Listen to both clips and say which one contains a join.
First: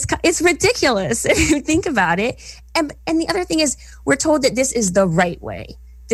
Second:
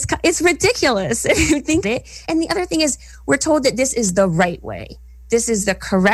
second; 2 cuts; at 1.8 s, 2.2 s

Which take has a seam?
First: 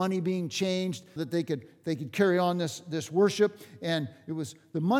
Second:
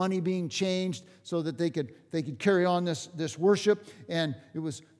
first; 1 cut; at 1.2 s

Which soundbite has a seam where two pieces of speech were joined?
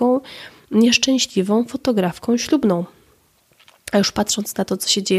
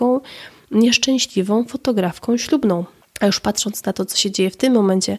second; 1 cut; at 3.0 s

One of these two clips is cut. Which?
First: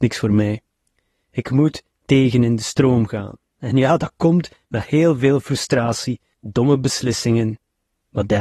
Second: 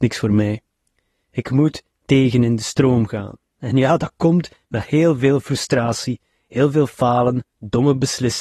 first; 1 cut; at 6.3 s

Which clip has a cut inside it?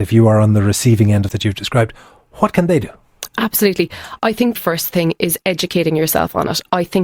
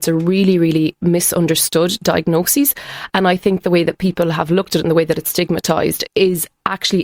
first; 2 cuts; at 1.3 s, 4.6 s

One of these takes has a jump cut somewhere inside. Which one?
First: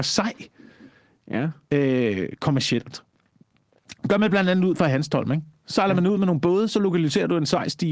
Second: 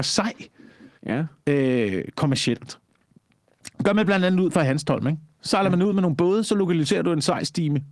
second; 1 cut; at 1.0 s

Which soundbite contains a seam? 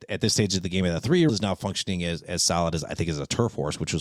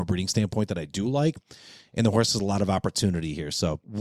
first; 1 cut; at 1.3 s

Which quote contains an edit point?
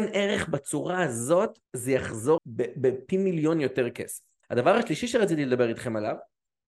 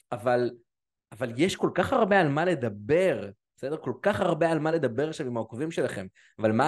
first; 3 cuts; at 1.7 s, 2.4 s, 4.4 s

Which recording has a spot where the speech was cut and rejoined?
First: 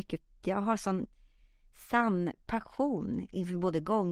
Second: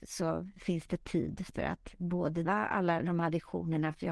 second; 1 cut; at 2.5 s

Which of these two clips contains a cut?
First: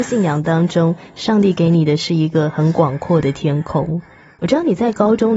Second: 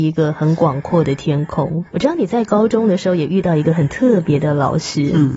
second; 1 cut; at 1.9 s

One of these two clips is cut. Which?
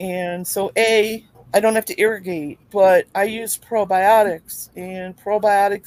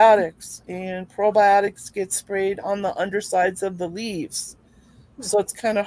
first; 2 cuts; at 1.3 s, 2.6 s

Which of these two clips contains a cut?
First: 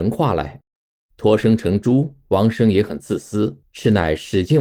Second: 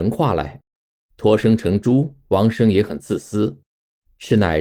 first; 1 cut; at 3.6 s

